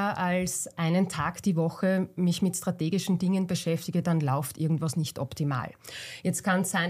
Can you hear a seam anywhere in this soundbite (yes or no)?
no